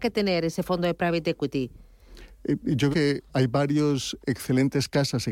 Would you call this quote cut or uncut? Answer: cut